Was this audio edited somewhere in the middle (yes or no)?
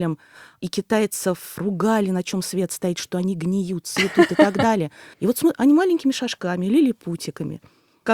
yes